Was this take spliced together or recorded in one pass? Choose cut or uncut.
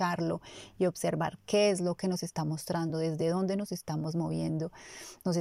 uncut